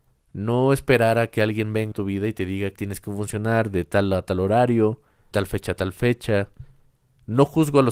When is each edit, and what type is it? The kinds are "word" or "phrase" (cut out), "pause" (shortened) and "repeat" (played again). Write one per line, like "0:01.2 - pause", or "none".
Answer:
0:01.9 - word
0:02.7 - word
0:05.3 - word